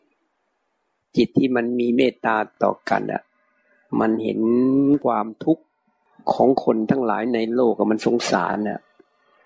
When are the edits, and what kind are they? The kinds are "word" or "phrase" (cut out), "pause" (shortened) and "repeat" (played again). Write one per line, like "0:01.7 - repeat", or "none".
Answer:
none